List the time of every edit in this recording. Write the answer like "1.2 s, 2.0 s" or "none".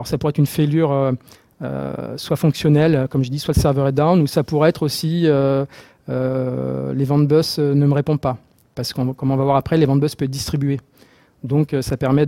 none